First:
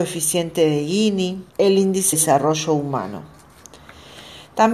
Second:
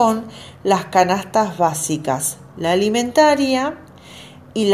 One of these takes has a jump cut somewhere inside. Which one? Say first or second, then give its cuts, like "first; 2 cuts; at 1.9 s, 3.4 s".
first; 2 cuts; at 1.5 s, 2.1 s